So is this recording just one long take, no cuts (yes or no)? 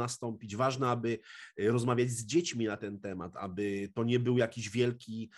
yes